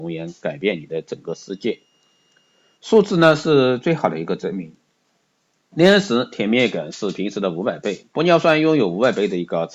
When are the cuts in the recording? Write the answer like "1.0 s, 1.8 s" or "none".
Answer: none